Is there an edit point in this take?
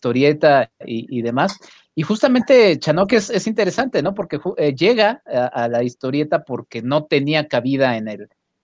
no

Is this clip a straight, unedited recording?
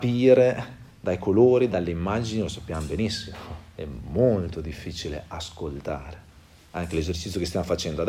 yes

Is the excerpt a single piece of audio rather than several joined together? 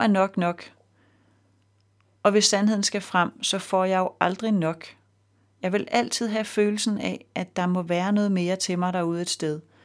yes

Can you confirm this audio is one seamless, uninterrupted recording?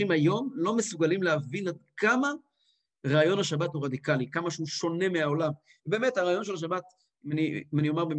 yes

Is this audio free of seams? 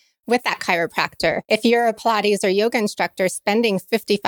no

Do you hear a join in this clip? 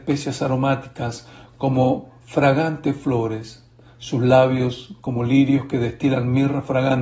no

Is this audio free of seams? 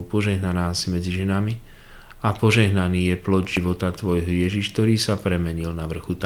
yes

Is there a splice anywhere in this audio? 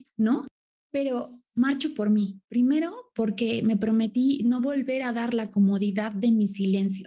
no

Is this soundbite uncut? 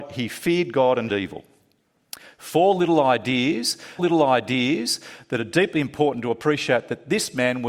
no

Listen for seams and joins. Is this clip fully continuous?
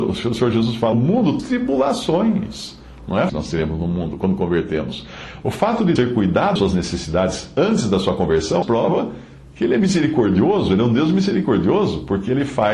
no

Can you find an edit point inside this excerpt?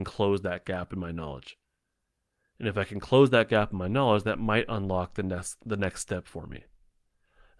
no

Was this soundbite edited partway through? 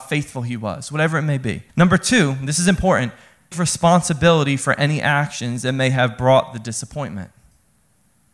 yes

